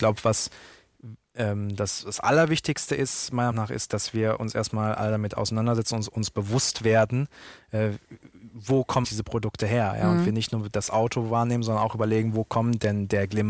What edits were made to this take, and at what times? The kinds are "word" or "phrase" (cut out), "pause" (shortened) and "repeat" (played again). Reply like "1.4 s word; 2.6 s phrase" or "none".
3.5 s word; 9.0 s word